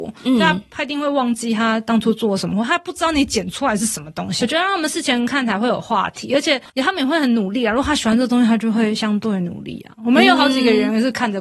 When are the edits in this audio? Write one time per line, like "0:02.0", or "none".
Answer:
0:04.4